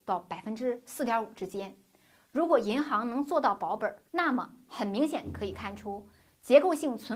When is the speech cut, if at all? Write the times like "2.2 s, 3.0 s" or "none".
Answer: 4.1 s